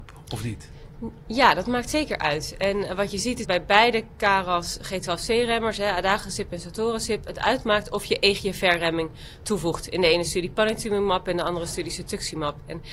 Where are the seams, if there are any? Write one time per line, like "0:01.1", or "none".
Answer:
0:03.4